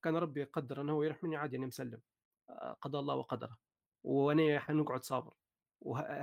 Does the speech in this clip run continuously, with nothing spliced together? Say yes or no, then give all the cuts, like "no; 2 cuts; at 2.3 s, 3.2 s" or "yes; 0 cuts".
yes; 0 cuts